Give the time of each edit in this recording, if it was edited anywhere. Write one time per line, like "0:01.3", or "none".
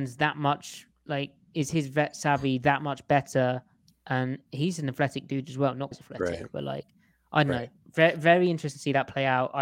0:04.5
0:05.9